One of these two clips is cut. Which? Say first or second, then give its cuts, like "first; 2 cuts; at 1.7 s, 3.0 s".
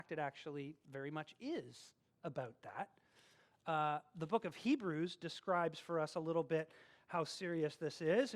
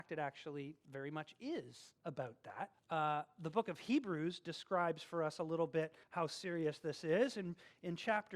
second; 3 cuts; at 2.0 s, 2.7 s, 6.0 s